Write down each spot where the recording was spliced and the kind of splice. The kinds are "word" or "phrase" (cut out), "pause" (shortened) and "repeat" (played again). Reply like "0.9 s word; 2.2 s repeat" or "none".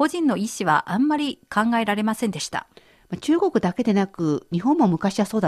none